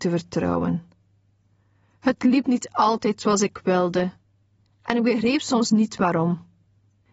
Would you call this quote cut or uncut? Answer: uncut